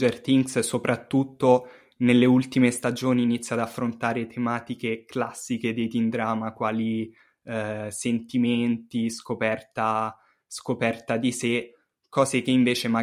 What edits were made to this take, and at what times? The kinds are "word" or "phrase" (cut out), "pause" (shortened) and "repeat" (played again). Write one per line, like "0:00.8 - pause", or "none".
none